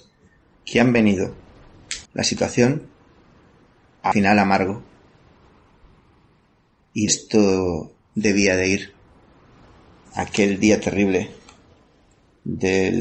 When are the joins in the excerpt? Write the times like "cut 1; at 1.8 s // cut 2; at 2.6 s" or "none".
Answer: cut 1; at 2.1 s // cut 2; at 4.1 s // cut 3; at 7.1 s // cut 4; at 8.0 s